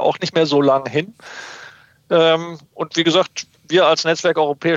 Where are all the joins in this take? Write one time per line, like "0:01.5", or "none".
none